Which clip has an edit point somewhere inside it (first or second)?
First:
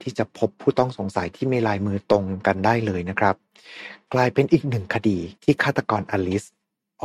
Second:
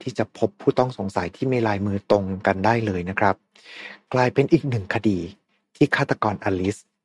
first